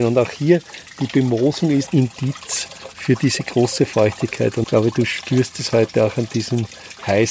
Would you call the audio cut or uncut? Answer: cut